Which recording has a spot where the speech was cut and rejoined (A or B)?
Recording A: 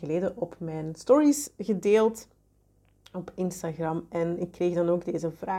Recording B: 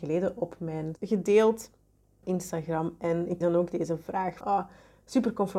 B